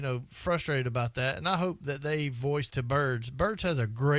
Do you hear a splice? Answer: yes; 1 cut; at 2.7 s

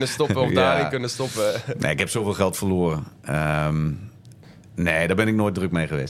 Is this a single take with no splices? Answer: yes; 0 cuts

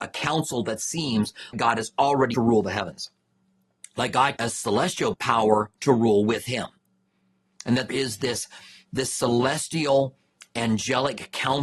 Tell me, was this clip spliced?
yes; 5 cuts; at 1.5 s, 2.3 s, 4.4 s, 5.1 s, 7.9 s

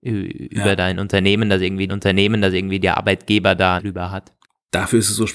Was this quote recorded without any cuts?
no; 3 cuts; at 1.9 s, 3.8 s, 4.4 s

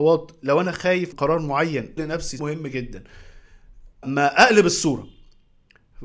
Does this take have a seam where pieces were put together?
yes; 4 cuts; at 1.1 s, 2.0 s, 2.4 s, 4.0 s

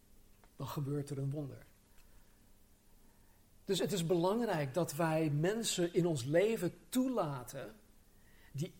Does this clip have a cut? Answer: no; 0 cuts

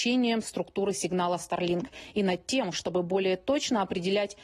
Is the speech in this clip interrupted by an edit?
no; 0 cuts

